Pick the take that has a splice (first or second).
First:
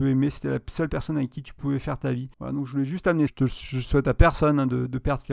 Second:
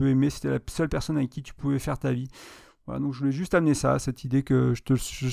first